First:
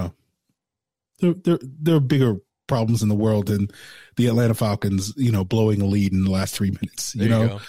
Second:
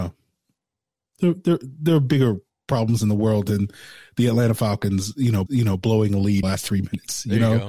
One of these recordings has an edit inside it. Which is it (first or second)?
second